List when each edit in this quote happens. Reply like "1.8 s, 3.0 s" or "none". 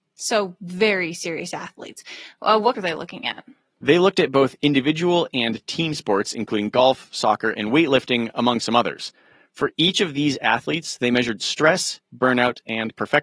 2.7 s